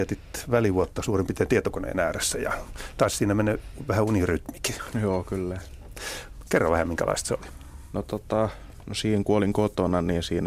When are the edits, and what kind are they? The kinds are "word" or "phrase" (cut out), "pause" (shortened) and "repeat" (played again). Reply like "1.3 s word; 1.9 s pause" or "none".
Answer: none